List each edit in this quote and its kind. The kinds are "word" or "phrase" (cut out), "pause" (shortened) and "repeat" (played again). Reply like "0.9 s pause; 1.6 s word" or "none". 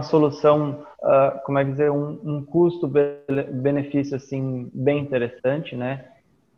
0.9 s pause